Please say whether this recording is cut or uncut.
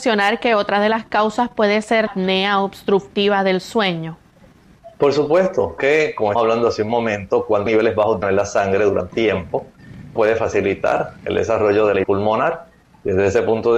cut